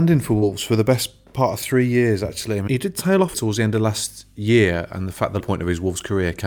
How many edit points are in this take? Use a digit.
3